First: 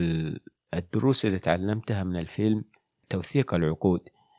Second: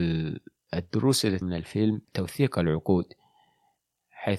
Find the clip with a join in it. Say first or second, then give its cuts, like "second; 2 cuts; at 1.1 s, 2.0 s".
second; 2 cuts; at 1.4 s, 2.0 s